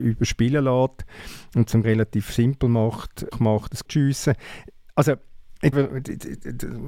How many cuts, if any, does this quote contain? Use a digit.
4